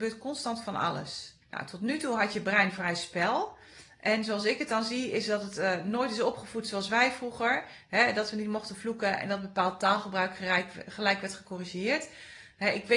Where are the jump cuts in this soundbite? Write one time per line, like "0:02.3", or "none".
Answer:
0:01.4